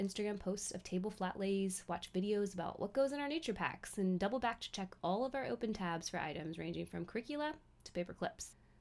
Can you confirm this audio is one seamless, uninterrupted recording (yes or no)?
yes